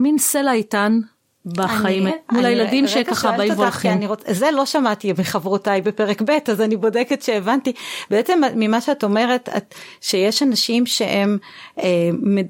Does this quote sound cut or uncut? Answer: cut